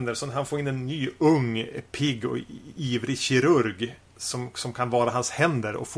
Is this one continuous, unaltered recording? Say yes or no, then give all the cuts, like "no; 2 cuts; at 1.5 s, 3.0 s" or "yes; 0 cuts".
yes; 0 cuts